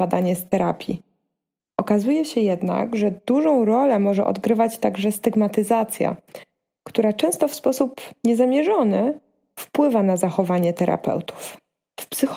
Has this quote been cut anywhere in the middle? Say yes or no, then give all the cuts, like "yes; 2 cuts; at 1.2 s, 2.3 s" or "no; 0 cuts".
no; 0 cuts